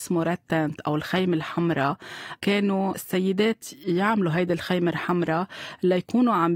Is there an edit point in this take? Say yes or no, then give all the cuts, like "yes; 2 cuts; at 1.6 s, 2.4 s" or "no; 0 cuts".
no; 0 cuts